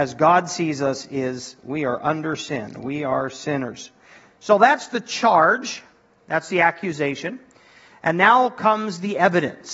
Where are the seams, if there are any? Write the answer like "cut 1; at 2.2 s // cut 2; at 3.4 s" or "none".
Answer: none